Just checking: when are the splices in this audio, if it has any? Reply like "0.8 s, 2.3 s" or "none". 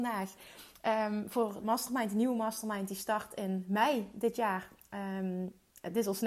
1.6 s